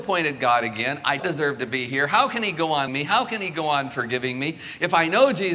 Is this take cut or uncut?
cut